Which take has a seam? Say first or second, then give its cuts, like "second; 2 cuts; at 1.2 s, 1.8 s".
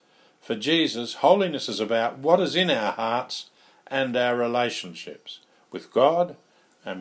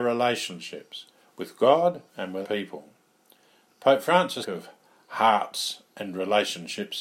second; 3 cuts; at 2.1 s, 2.4 s, 4.4 s